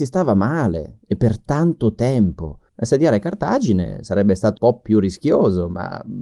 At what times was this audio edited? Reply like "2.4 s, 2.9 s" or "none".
2.7 s, 4.6 s

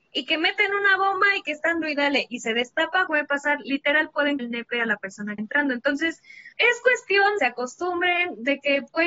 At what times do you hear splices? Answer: 1.8 s, 3.1 s, 4.4 s, 5.4 s, 6.5 s, 7.4 s

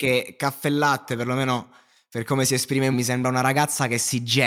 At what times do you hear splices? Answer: 2.9 s

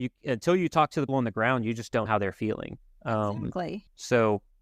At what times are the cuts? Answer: 1.1 s, 2.1 s

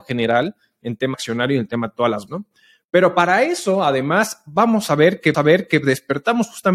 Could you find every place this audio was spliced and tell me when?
1.1 s, 2.3 s, 5.3 s

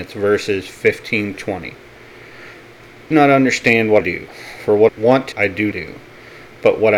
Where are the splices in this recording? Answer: 1.3 s, 3.1 s, 4.0 s, 4.9 s, 5.3 s, 5.7 s

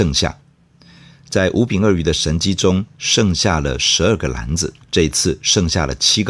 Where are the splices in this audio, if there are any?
4.8 s

